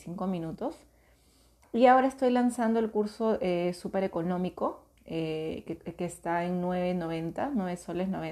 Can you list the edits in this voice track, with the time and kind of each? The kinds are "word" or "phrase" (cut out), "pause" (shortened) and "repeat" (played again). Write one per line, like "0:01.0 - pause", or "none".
none